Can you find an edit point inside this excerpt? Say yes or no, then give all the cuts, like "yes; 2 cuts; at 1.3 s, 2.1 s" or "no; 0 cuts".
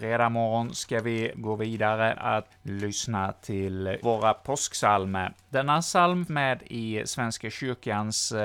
yes; 5 cuts; at 1.3 s, 2.2 s, 2.5 s, 4.0 s, 6.3 s